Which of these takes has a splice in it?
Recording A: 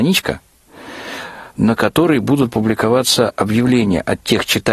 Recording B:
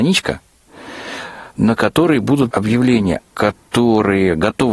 B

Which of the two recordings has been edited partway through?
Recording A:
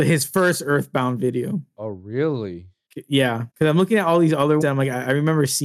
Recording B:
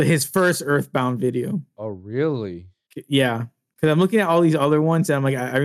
A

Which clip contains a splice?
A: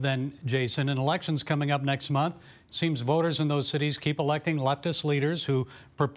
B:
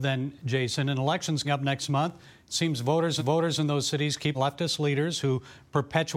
B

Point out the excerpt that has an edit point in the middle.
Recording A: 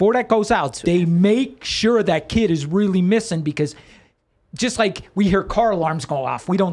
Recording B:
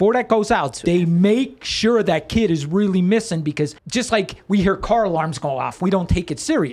B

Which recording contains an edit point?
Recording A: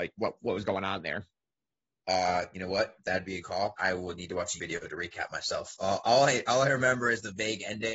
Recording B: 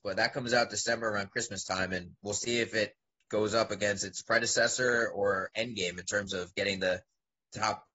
A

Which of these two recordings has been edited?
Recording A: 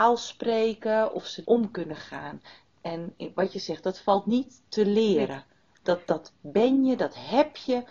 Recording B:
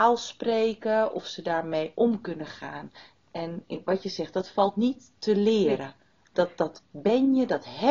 A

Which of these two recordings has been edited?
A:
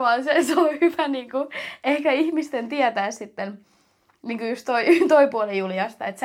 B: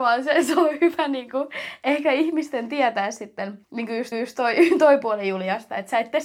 B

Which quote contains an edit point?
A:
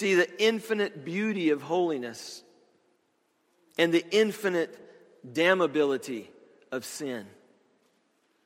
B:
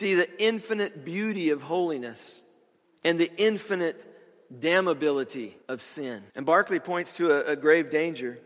B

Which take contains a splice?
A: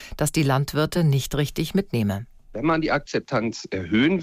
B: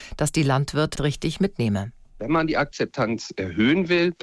B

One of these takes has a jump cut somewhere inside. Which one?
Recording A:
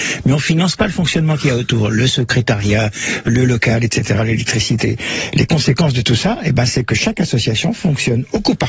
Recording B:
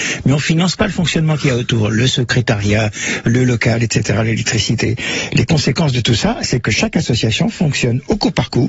B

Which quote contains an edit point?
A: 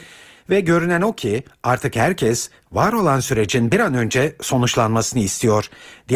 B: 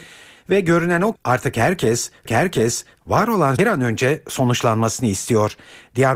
B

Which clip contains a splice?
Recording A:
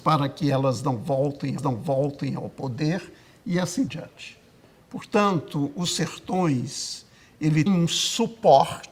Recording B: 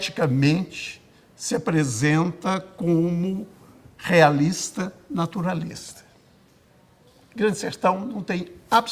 A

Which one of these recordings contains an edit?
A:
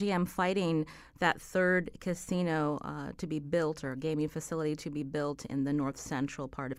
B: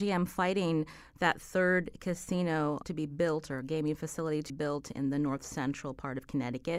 B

